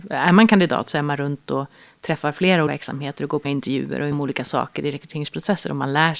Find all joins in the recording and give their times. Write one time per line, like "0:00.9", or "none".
0:02.7
0:03.4
0:04.1